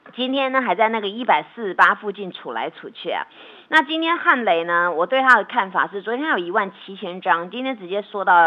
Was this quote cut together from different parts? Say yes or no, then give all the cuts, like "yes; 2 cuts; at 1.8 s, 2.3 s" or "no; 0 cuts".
no; 0 cuts